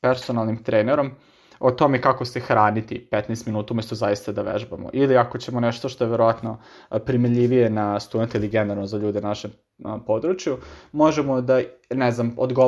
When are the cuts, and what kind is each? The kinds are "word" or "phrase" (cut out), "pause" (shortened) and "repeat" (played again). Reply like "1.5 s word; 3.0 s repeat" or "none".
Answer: none